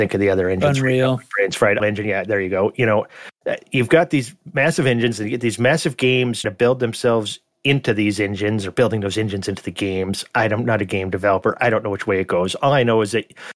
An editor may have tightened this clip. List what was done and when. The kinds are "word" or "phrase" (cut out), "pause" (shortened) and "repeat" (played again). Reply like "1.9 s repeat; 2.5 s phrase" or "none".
1.8 s word; 6.4 s word